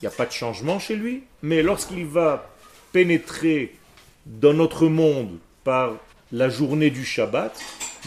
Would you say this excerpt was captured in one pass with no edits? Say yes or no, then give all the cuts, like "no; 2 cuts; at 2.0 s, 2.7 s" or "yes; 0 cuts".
no; 2 cuts; at 3.8 s, 6.1 s